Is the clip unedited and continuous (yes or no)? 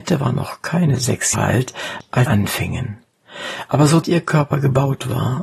no